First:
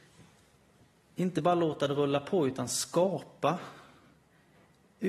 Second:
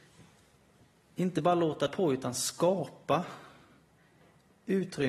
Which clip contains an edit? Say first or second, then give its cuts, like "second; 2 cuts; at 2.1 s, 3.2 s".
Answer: second; 1 cut; at 1.9 s